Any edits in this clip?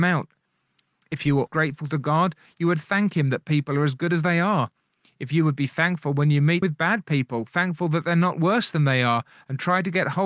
yes; 2 cuts; at 1.5 s, 6.6 s

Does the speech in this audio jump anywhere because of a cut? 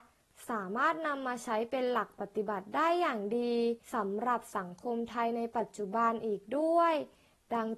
yes; 1 cut; at 3.8 s

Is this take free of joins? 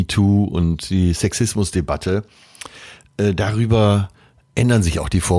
yes; 0 cuts

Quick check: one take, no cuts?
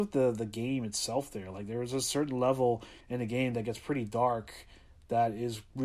no; 1 cut; at 3.0 s

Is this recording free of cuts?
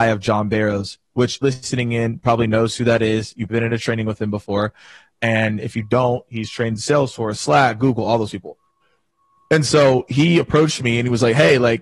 no; 2 cuts; at 1.4 s, 3.5 s

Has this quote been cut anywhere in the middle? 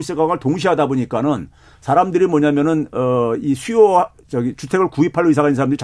no; 0 cuts

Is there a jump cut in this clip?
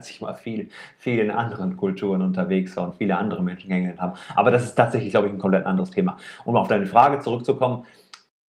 no; 0 cuts

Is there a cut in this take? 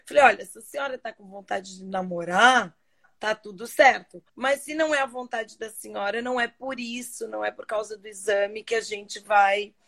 yes; 1 cut; at 4.3 s

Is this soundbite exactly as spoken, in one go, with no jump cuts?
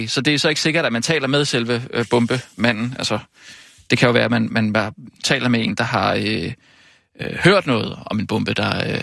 yes; 0 cuts

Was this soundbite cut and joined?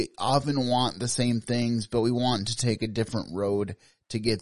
no; 0 cuts

